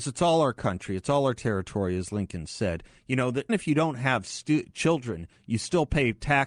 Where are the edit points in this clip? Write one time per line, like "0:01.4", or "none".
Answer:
0:03.5